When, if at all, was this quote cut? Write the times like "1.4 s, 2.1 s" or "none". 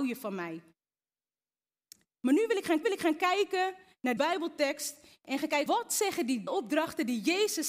2.8 s, 4.2 s, 5.7 s, 6.5 s